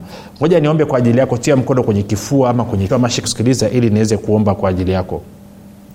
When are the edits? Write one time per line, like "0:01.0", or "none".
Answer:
0:02.9
0:03.2